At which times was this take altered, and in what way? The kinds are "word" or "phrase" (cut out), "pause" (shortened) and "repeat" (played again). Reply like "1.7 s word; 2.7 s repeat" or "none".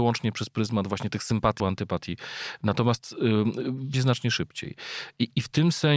1.6 s word; 3.9 s phrase